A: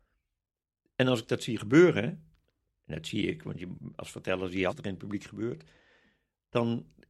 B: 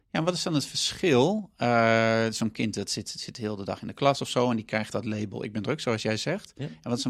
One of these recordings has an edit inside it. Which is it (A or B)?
A